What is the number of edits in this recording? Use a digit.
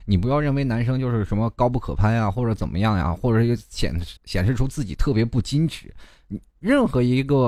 1